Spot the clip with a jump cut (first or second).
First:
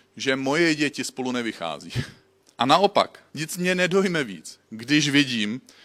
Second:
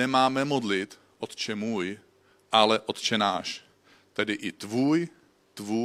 first